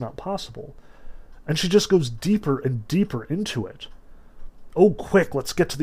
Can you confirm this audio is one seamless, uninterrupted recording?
yes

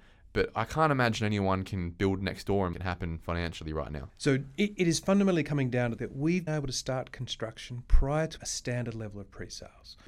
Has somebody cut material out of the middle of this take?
yes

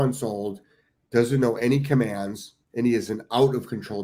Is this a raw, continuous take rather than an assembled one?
no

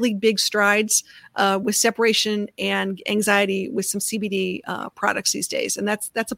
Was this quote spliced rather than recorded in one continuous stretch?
no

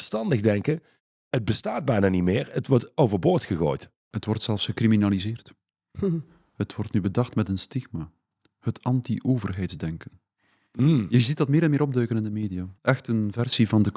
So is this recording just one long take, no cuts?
no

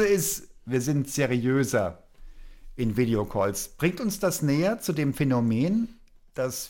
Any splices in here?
no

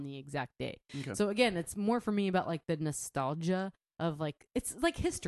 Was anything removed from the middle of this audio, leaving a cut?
no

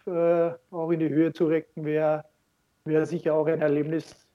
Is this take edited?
no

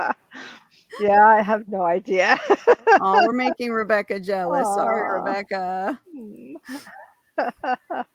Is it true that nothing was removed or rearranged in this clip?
yes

